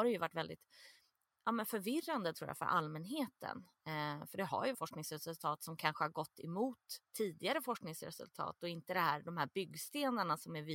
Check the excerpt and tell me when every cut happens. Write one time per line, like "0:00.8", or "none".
0:04.7
0:07.0